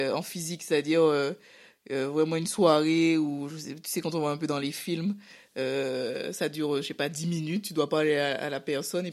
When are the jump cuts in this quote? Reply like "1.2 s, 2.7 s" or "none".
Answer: none